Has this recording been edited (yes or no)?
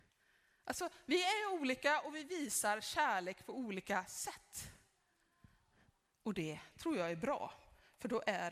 no